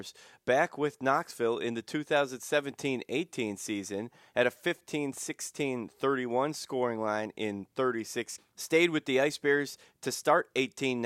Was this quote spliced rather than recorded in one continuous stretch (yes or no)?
yes